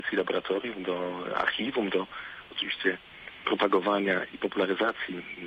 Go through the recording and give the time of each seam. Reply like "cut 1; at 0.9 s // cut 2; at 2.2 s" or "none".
none